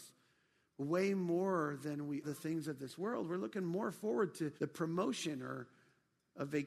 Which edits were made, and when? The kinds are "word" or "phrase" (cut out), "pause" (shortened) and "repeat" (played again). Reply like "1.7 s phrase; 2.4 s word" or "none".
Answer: 2.2 s word; 4.6 s pause